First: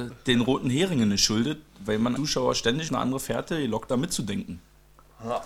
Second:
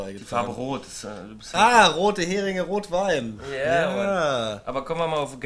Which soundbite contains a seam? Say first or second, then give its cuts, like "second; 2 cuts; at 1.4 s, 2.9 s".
first; 3 cuts; at 2.2 s, 2.9 s, 3.9 s